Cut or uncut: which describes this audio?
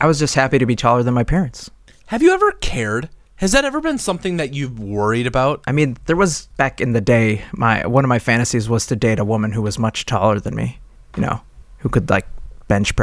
uncut